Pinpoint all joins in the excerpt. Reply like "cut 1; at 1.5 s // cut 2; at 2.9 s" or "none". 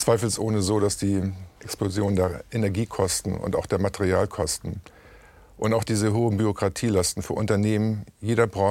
cut 1; at 1.6 s